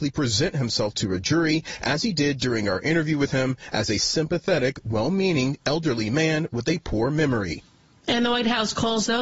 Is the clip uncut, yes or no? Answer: yes